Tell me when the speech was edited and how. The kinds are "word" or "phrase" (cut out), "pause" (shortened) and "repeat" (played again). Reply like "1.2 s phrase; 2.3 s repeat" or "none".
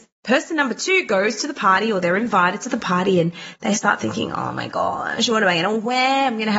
none